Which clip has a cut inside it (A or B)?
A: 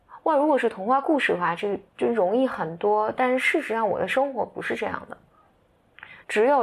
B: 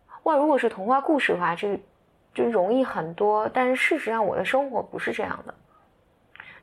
A